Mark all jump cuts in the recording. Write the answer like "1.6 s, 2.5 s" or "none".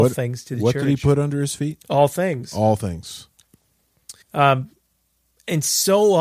4.2 s